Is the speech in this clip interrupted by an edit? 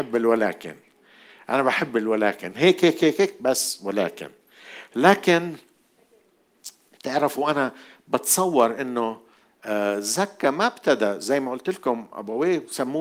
no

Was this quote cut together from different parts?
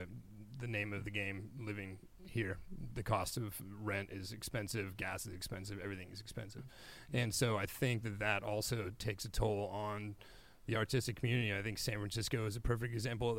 no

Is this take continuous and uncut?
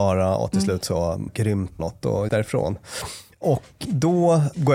no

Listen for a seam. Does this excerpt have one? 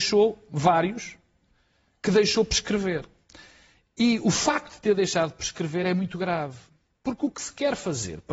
no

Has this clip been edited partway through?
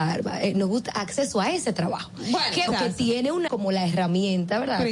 yes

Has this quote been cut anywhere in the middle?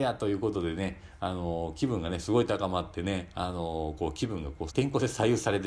yes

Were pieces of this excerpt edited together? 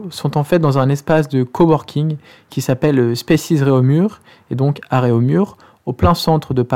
no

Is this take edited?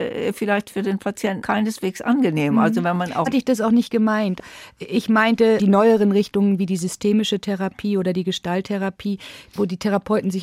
yes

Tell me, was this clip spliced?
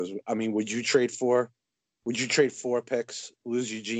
no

